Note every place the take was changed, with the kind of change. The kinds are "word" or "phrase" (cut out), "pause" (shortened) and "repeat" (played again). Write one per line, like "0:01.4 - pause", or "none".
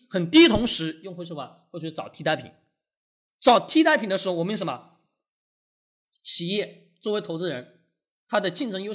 none